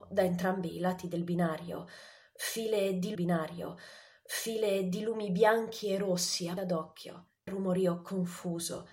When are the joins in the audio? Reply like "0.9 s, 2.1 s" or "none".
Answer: 3.1 s, 6.6 s, 7.5 s

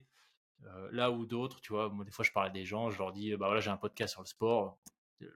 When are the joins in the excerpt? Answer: none

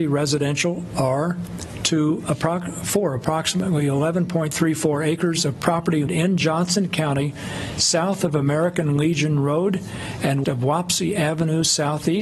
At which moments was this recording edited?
6.1 s, 10.4 s

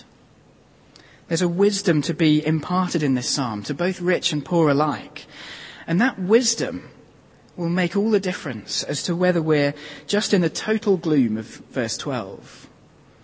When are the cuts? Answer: none

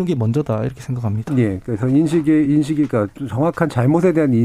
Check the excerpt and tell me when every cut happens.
none

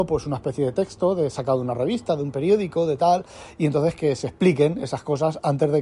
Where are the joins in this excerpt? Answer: none

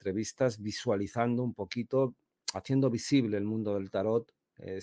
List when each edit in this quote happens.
none

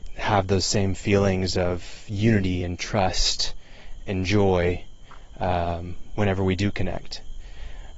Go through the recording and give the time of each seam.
none

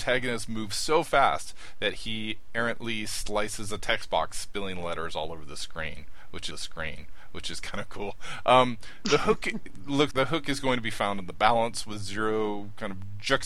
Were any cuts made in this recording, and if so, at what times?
6.5 s, 10.1 s

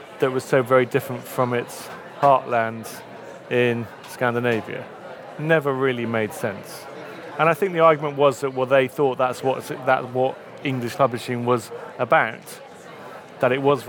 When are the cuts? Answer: 11.0 s

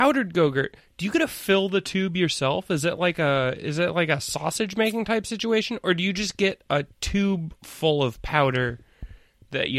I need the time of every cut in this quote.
none

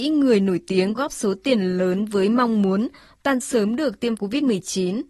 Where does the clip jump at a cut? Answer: 1.0 s, 3.4 s, 4.2 s

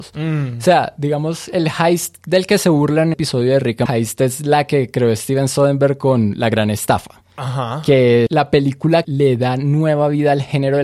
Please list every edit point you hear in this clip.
3.1 s, 3.9 s, 8.3 s, 9.0 s

